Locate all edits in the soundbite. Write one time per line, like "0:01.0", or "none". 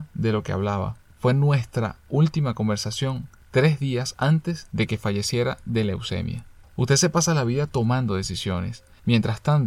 none